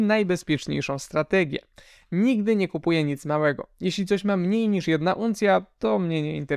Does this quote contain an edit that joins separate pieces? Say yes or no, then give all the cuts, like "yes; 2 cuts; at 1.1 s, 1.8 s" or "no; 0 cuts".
no; 0 cuts